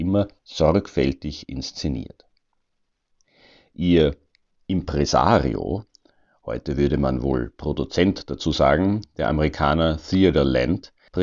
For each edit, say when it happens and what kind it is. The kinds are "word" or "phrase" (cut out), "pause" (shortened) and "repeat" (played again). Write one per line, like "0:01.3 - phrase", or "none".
none